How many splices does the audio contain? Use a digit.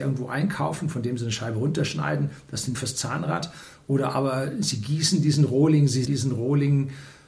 2